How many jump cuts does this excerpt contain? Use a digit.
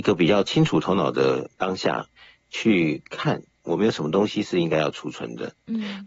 0